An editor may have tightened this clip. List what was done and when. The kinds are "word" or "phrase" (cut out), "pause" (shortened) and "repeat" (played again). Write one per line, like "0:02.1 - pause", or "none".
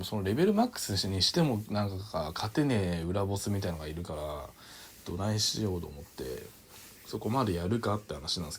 0:07.0 - pause

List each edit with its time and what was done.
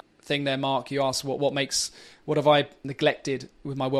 none

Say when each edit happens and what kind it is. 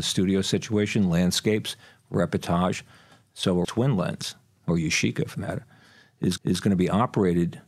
0:03.6 - word
0:05.3 - word
0:06.4 - repeat

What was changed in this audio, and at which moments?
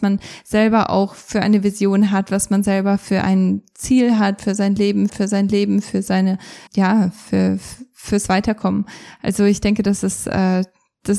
0:05.1 - repeat
0:06.7 - word

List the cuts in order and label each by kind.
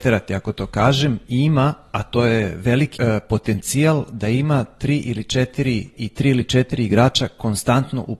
0:03.0 - word
0:05.9 - word

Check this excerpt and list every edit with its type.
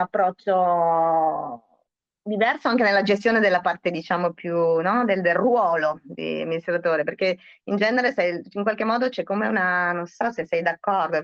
none

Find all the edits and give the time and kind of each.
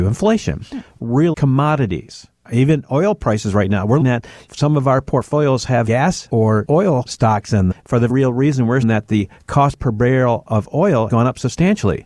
0:01.3 - word
0:04.0 - word
0:07.7 - word
0:08.1 - word
0:08.8 - word
0:11.1 - word

